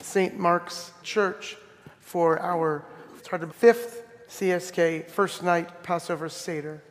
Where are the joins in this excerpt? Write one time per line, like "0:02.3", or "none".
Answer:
0:01.0
0:03.2
0:03.5
0:04.3